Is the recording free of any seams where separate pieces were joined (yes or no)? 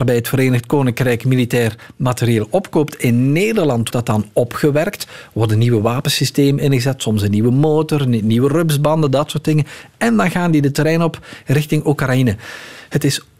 no